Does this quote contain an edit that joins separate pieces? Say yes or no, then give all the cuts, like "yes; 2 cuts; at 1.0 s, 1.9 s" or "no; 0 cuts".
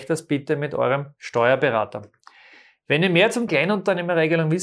yes; 1 cut; at 3.5 s